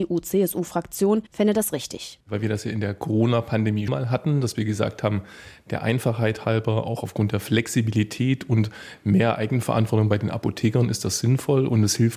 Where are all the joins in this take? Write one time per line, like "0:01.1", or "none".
0:01.3
0:03.9

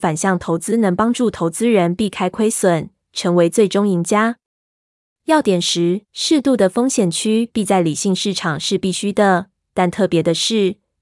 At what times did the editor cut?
0:06.0

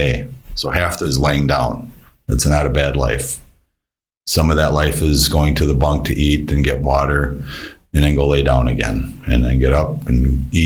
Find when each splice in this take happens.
0:01.0

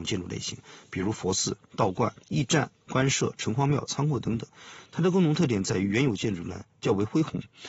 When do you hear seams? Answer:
0:02.2

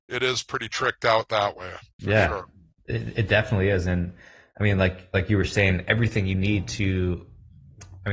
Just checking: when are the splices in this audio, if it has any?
none

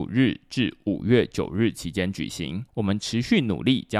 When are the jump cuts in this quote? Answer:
0:02.7

